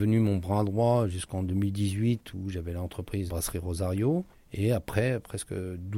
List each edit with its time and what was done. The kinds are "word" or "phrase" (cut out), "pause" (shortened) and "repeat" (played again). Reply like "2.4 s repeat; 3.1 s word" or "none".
3.3 s word; 4.3 s pause